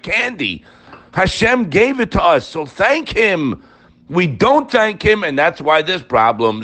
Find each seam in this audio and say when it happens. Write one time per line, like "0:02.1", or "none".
none